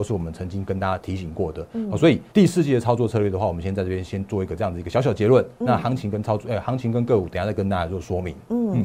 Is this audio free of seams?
no; 1 cut; at 2.3 s

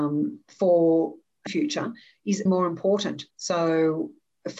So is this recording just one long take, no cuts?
no; 3 cuts; at 1.5 s, 2.5 s, 3.3 s

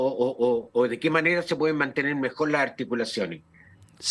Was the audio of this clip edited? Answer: no; 0 cuts

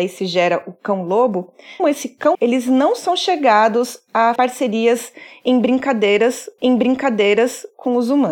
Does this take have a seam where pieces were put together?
yes; 4 cuts; at 1.8 s, 2.3 s, 4.4 s, 6.6 s

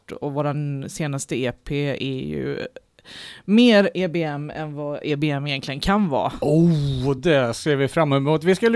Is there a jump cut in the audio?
no; 0 cuts

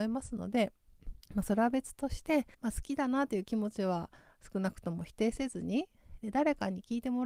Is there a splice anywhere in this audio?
yes; 2 cuts; at 1.2 s, 2.5 s

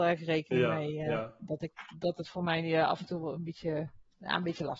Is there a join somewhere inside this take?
no; 0 cuts

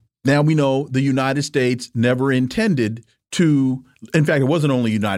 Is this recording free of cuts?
yes; 0 cuts

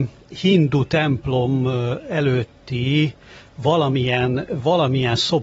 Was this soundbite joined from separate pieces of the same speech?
no; 0 cuts

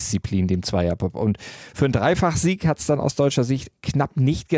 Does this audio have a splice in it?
no; 0 cuts

